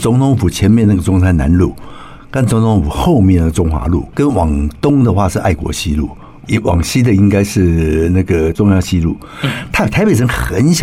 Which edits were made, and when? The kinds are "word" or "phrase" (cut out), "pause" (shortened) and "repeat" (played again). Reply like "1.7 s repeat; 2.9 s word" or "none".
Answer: 4.1 s word

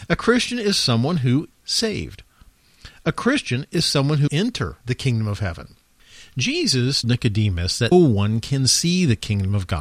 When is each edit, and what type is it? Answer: 1.5 s word; 4.3 s word; 4.8 s pause; 7.0 s word; 7.9 s word

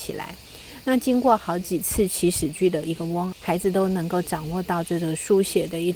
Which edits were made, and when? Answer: 3.3 s phrase

